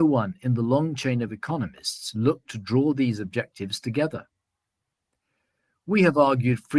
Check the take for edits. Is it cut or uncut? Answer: uncut